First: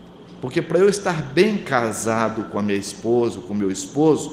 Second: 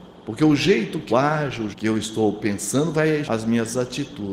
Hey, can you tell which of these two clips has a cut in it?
second; 3 cuts; at 1.1 s, 1.7 s, 3.2 s

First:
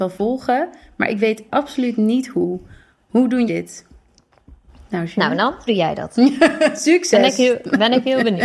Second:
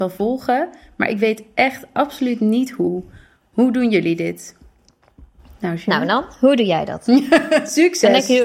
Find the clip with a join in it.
first; 3 cuts; at 1.5 s, 3.5 s, 5.7 s

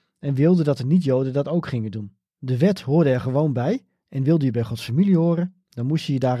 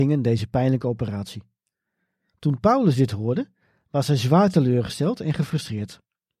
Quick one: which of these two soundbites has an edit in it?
first; 1 cut; at 2.3 s

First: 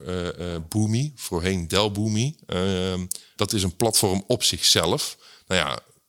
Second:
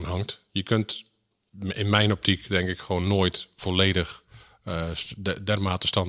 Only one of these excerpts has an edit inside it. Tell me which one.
first; 1 cut; at 3.4 s

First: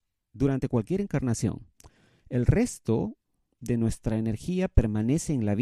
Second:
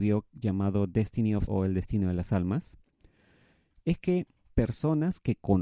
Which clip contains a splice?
second; 2 cuts; at 1.5 s, 4.5 s

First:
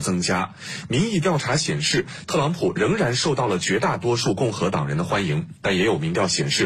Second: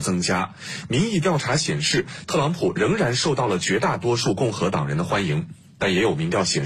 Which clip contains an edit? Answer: first; 1 cut; at 5.6 s

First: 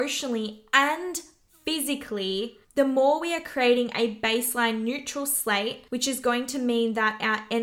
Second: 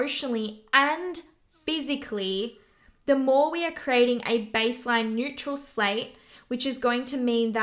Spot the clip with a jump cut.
first; 2 cuts; at 2.6 s, 5.9 s

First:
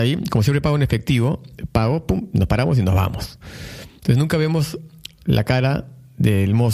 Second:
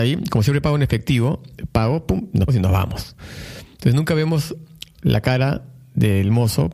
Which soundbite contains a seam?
second; 1 cut; at 2.5 s

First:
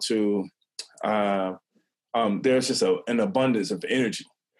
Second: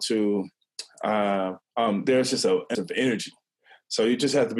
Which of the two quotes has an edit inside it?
second; 2 cuts; at 1.6 s, 2.7 s

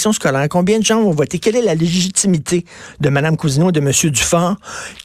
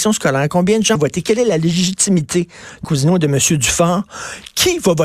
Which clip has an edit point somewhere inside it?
second; 2 cuts; at 1.0 s, 2.8 s

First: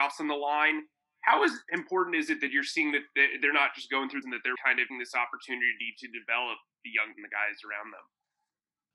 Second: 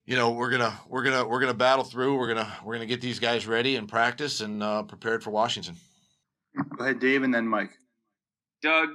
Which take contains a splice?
first; 4 cuts; at 4.2 s, 4.5 s, 4.9 s, 7.1 s

